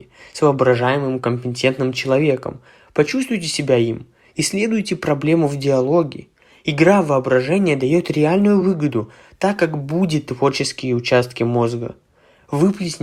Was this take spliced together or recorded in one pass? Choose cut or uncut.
uncut